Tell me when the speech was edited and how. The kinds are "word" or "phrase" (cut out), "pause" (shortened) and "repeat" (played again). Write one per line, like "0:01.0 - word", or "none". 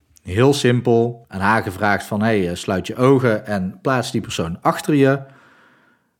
0:01.2 - pause